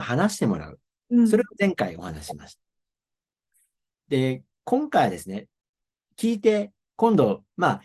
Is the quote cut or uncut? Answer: uncut